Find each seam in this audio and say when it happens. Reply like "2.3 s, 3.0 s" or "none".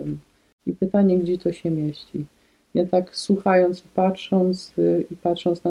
3.8 s

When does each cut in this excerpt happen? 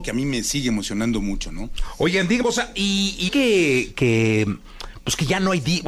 2.4 s, 3.3 s

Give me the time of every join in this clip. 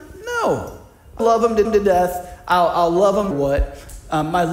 1.2 s, 1.6 s, 3.3 s

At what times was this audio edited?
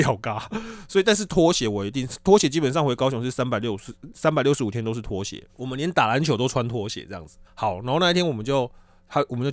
5.5 s, 7.4 s

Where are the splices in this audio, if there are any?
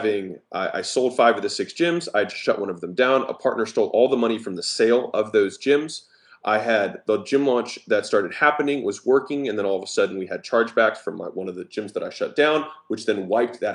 none

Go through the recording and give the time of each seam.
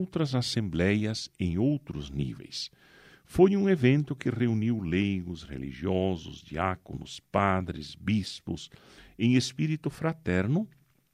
none

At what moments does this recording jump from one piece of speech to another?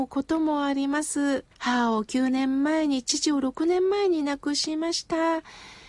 1.5 s

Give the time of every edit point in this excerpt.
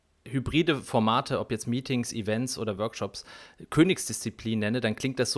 none

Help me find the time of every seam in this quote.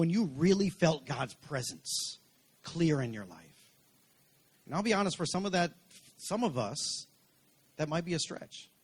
none

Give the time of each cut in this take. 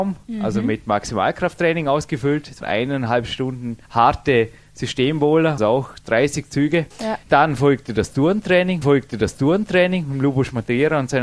2.6 s, 3.8 s, 5.6 s, 6.9 s, 8.8 s

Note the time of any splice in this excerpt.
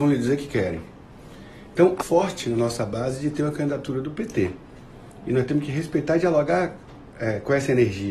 2.0 s

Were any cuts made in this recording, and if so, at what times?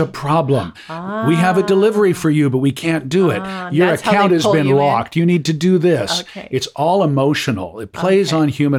none

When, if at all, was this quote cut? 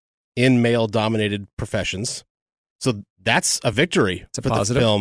none

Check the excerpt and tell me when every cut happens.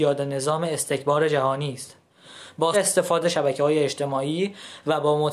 2.7 s, 3.2 s

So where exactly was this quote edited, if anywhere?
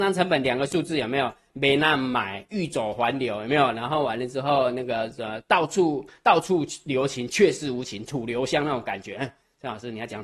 none

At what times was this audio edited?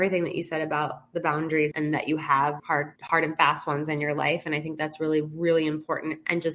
1.7 s, 2.6 s, 3.0 s

